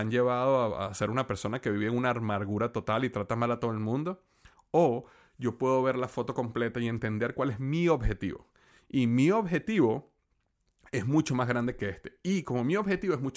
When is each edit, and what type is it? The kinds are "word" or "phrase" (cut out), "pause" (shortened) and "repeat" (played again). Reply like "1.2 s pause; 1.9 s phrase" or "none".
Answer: none